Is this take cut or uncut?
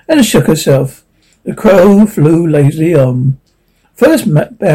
uncut